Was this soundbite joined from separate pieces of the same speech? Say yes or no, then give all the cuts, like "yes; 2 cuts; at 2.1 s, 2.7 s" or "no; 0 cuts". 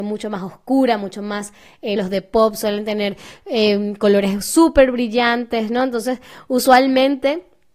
yes; 1 cut; at 2.0 s